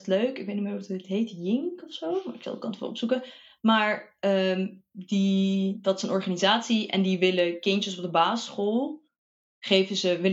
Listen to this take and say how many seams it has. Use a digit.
0